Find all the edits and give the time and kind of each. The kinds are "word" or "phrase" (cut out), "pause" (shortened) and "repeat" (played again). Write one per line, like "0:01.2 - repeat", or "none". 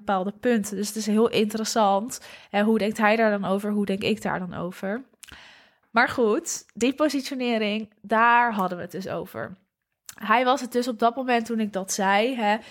none